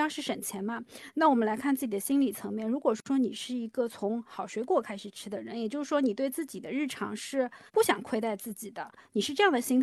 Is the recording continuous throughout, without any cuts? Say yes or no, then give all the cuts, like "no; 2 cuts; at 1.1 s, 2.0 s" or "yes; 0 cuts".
no; 1 cut; at 7.7 s